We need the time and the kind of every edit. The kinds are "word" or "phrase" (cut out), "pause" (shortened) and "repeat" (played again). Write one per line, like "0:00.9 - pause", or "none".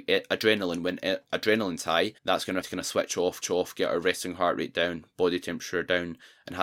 0:02.2 - pause
0:02.6 - phrase
0:03.4 - repeat